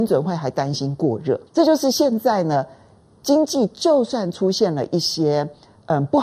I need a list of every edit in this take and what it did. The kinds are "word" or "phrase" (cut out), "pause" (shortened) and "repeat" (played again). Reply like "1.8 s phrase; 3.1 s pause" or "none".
1.5 s pause